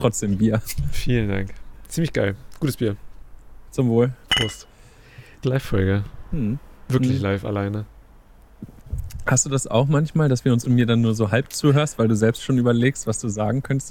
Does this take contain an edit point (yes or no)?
yes